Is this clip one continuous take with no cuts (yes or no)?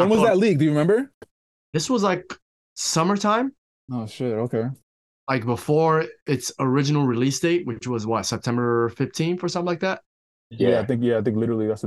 yes